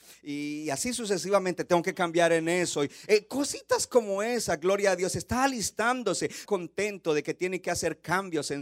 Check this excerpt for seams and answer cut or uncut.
cut